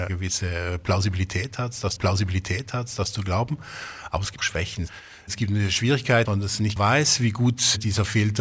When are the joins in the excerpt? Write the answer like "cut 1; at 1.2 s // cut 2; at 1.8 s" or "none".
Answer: cut 1; at 2.0 s // cut 2; at 4.4 s // cut 3; at 6.2 s // cut 4; at 6.8 s